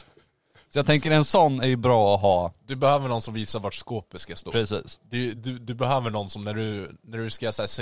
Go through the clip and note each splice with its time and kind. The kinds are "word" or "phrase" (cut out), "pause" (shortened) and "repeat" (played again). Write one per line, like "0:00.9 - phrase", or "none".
none